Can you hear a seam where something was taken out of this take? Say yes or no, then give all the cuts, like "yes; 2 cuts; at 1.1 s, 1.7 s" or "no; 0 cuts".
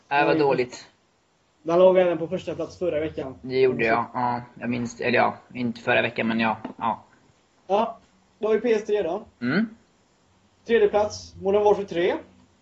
no; 0 cuts